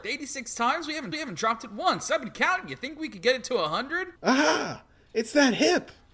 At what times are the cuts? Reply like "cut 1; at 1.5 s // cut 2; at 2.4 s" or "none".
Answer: cut 1; at 1.1 s // cut 2; at 4.2 s